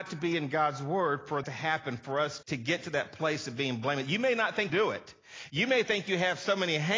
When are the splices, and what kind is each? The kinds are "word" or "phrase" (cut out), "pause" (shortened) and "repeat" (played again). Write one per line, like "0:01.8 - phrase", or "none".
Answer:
0:01.4 - word
0:02.4 - word
0:04.7 - phrase